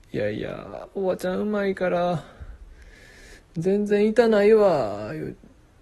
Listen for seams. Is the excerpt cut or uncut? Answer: uncut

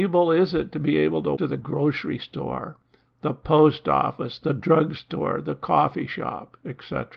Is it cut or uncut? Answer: cut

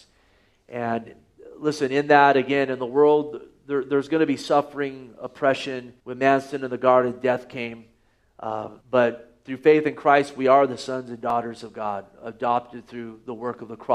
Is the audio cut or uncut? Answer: cut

